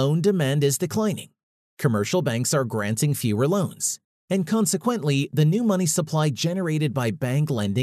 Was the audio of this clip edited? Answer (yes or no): no